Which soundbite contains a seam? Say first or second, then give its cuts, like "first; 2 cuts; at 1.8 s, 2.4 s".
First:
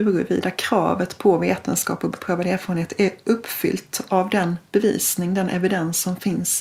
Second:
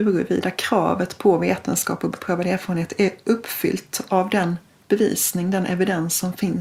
first; 1 cut; at 4.7 s